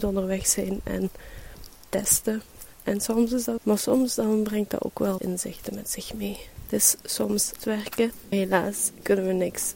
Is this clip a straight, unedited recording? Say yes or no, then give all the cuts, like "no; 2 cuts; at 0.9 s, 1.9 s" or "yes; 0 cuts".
no; 5 cuts; at 1.9 s, 3.6 s, 5.2 s, 7.6 s, 8.3 s